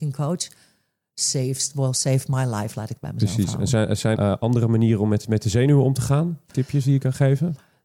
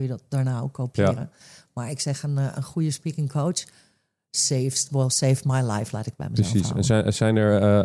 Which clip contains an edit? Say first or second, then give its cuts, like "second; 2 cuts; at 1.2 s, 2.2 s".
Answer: first; 1 cut; at 4.1 s